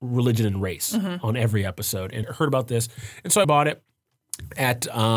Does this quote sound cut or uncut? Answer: cut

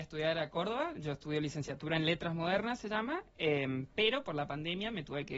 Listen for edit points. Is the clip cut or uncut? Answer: uncut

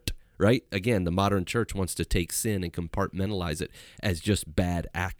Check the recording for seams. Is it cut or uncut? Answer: uncut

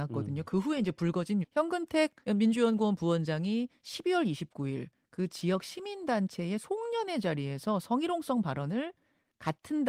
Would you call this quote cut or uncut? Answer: cut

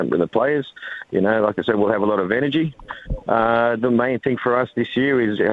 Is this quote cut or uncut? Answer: uncut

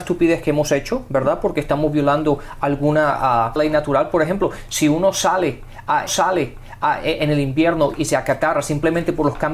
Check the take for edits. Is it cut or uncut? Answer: cut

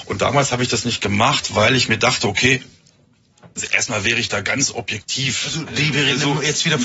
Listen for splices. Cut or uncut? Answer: uncut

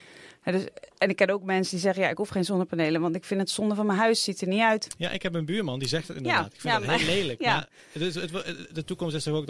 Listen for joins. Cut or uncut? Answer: cut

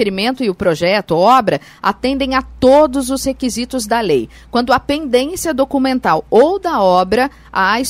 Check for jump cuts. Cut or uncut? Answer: uncut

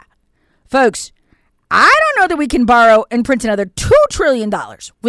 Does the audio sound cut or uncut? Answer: uncut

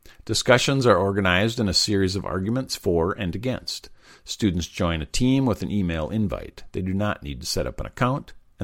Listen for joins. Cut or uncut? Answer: uncut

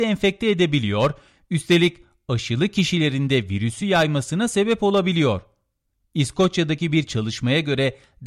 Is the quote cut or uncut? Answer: uncut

